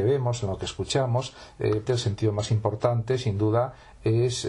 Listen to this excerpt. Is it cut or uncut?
cut